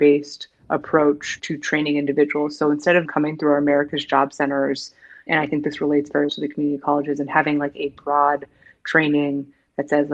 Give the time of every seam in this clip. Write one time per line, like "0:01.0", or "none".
0:01.4
0:03.1
0:05.3
0:06.3